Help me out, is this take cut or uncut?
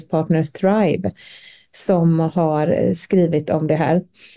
uncut